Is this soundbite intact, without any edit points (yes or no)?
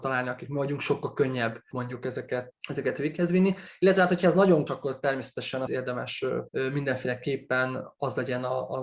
no